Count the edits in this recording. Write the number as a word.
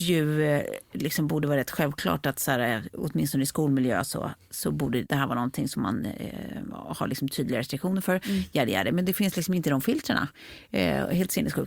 zero